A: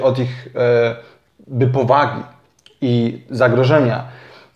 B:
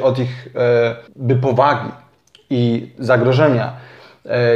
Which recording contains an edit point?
B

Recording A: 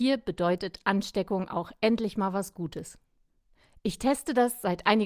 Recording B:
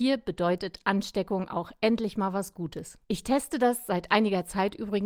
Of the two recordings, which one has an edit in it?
B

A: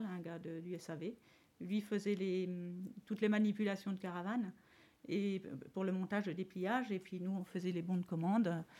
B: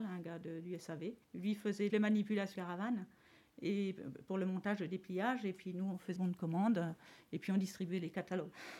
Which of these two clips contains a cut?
B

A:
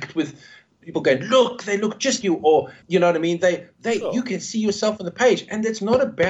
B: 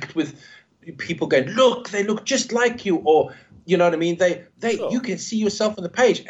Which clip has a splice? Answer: A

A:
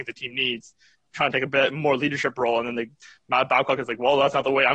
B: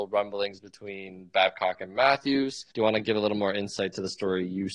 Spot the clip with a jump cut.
B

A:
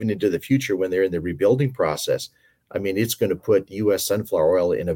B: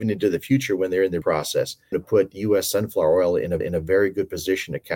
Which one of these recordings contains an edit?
B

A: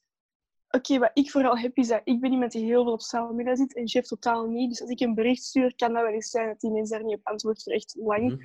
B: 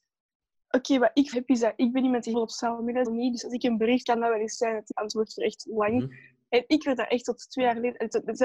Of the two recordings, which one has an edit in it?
B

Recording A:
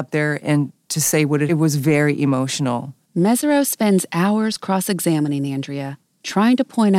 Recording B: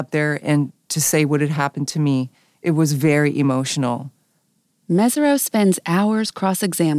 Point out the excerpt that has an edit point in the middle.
A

